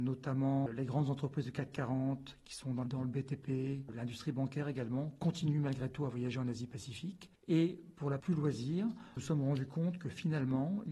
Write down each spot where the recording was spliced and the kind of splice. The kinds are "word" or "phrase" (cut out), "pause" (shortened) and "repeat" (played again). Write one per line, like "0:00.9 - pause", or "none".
0:02.9 - phrase
0:08.2 - word
0:09.2 - word